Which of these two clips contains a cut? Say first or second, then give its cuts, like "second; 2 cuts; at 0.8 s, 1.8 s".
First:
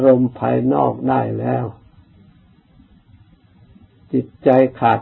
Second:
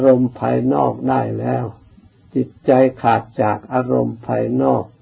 second; 1 cut; at 1.9 s